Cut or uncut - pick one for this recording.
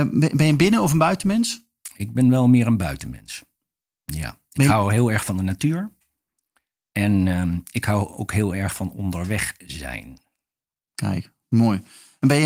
uncut